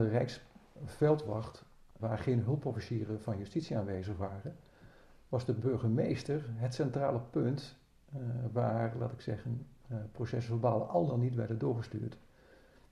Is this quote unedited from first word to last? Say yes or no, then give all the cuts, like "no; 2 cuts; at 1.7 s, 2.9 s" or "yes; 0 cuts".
no; 1 cut; at 2.0 s